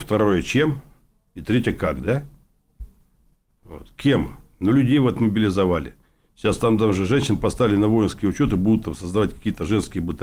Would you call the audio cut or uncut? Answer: uncut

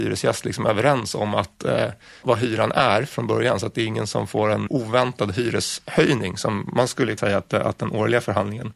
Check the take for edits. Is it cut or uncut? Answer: cut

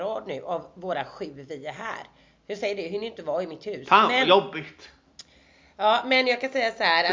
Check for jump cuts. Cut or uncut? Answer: uncut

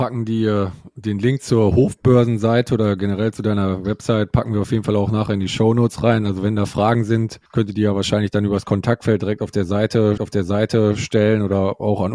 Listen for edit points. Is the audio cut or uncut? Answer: cut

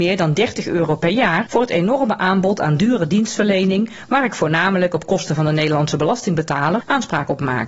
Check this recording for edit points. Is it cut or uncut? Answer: uncut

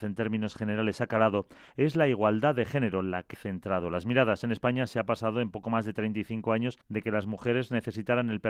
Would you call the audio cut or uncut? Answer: cut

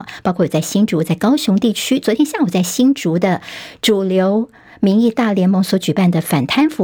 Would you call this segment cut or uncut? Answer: uncut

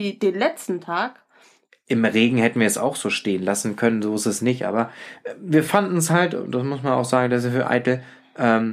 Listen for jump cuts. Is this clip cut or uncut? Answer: uncut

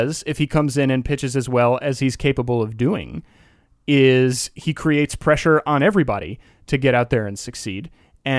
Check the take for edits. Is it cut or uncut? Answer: uncut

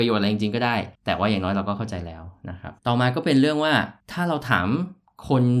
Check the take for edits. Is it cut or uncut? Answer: cut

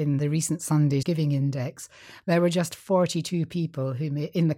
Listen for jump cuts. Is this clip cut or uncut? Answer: cut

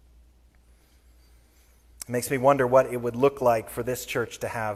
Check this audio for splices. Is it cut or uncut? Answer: uncut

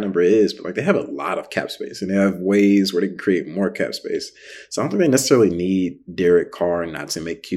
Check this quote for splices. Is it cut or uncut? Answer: uncut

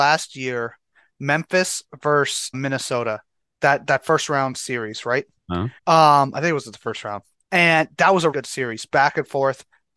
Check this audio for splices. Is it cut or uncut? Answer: cut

